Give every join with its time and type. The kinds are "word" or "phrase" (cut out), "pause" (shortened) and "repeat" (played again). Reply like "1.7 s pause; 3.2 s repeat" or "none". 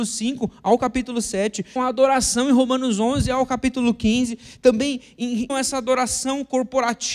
1.8 s phrase; 5.5 s word